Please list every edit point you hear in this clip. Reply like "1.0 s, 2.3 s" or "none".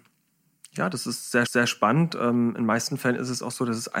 1.5 s

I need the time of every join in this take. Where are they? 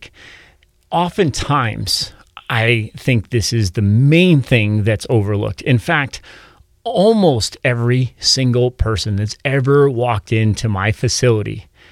none

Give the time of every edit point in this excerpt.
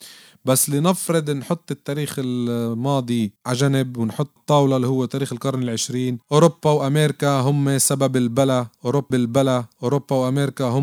3.4 s, 4.4 s, 6.2 s, 9.1 s

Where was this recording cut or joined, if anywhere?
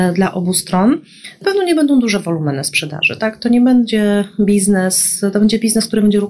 1.4 s

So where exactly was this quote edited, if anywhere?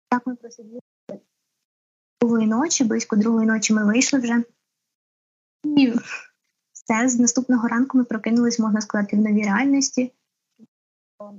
none

